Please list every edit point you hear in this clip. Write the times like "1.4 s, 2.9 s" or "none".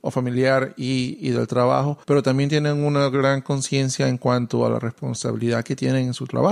2.0 s